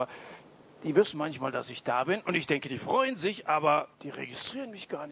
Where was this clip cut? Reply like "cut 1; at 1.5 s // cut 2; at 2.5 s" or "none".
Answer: cut 1; at 3.9 s